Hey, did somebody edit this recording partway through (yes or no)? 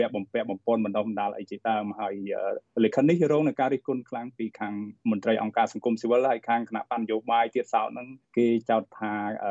yes